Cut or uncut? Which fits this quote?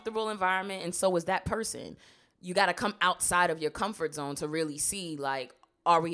uncut